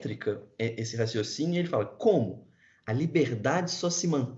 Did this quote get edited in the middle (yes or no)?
no